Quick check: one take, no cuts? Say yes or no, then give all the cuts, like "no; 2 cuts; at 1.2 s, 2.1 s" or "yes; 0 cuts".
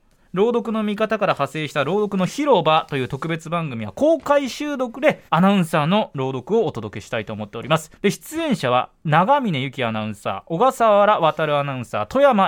no; 2 cuts; at 5.3 s, 8.0 s